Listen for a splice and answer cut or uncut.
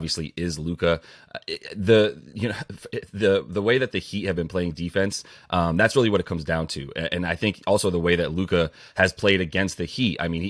uncut